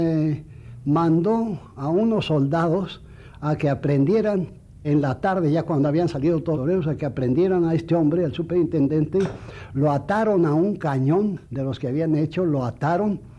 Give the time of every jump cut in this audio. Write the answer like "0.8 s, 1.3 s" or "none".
4.8 s, 6.5 s, 11.4 s